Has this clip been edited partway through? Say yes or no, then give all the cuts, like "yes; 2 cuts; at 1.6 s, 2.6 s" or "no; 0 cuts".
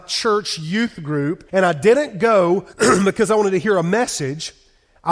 yes; 2 cuts; at 1.5 s, 2.7 s